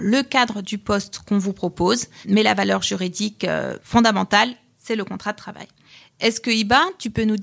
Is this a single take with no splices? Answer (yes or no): yes